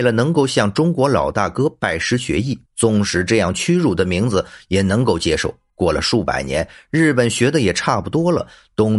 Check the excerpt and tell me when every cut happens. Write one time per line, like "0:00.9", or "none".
0:02.7
0:05.7